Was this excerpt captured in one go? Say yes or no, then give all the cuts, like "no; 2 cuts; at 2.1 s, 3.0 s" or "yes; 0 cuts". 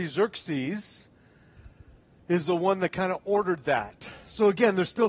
yes; 0 cuts